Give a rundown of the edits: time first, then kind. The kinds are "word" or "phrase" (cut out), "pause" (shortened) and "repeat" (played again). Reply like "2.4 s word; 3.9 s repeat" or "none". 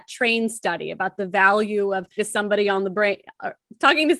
2.2 s word